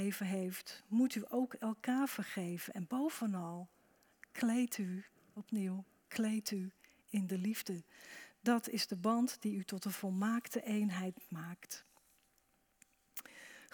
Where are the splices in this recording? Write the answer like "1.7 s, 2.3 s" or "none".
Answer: none